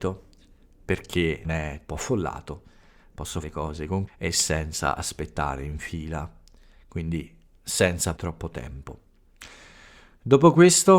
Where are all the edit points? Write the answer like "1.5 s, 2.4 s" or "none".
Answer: 1.4 s, 1.9 s, 3.4 s, 4.1 s, 8.2 s